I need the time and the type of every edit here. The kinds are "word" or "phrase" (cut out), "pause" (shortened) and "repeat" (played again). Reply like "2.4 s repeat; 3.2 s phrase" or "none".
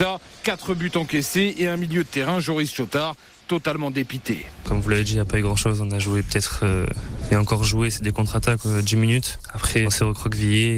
9.8 s word

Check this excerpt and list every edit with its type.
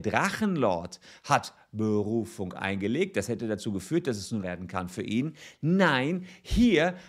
4.4 s phrase

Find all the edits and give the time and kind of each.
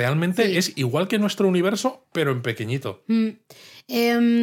none

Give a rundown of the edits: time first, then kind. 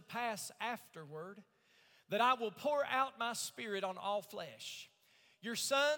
none

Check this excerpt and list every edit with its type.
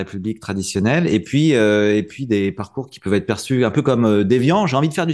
none

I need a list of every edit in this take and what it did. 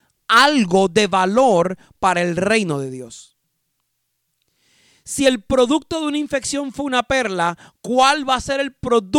none

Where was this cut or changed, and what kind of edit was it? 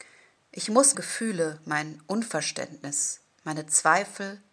0.9 s word

